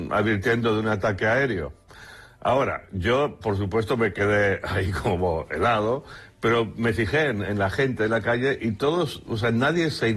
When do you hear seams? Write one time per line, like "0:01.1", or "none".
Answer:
none